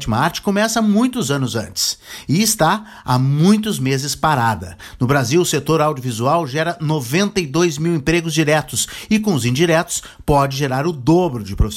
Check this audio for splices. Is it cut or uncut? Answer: uncut